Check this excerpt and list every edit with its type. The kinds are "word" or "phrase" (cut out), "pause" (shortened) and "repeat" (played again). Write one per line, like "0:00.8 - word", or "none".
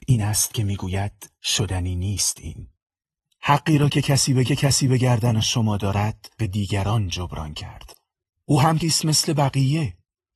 0:01.4 - pause
0:04.4 - repeat
0:06.4 - phrase
0:08.8 - word

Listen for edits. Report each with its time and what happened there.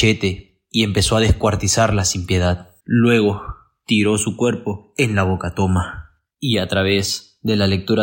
0:02.8 - pause
0:06.3 - pause

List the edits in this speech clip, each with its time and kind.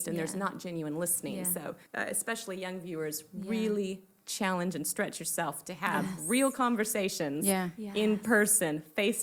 0:01.9 - pause

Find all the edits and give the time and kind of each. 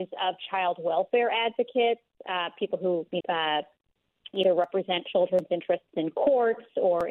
0:03.2 - word
0:04.3 - word

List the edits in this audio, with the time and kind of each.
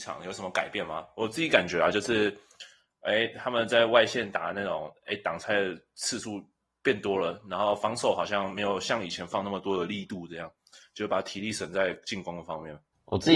none

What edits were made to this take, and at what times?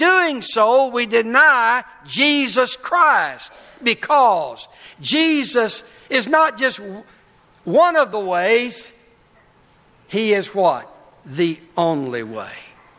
none

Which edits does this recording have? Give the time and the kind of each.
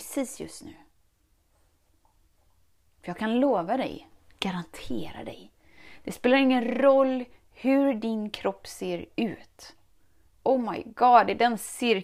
none

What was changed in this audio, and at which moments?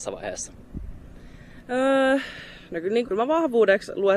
0:03.0 - word

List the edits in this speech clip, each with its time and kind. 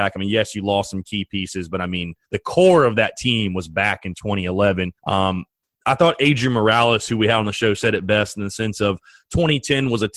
0:02.2 - pause
0:05.0 - pause

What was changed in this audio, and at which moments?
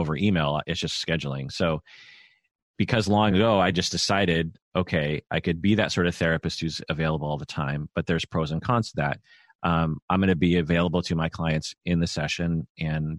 none

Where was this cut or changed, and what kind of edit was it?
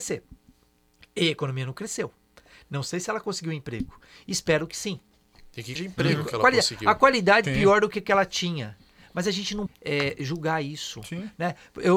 0:05.8 - word
0:07.4 - word
0:09.7 - word

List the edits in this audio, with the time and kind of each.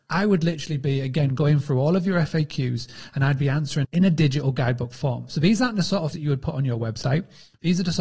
0:03.8 - word
0:06.1 - word

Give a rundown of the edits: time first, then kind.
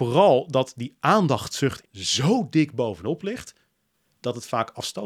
0:01.8 - word

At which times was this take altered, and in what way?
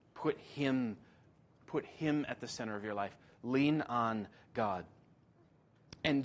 none

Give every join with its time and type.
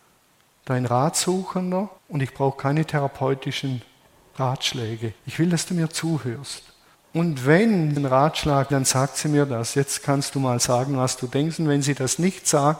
0:02.0 - pause
0:05.2 - pause
0:06.9 - pause
0:08.0 - word
0:08.7 - word

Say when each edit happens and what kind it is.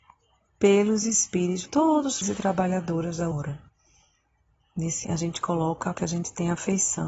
0:01.7 - word
0:02.2 - word
0:03.3 - word
0:05.0 - word
0:05.9 - word

